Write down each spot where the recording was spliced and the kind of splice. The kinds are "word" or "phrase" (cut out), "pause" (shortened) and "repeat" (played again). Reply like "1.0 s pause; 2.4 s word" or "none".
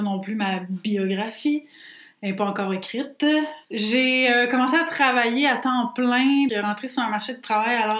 3.6 s pause; 6.5 s word